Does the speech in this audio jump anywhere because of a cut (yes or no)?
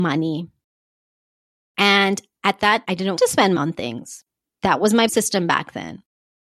yes